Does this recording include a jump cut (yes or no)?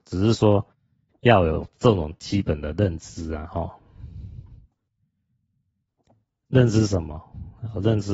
no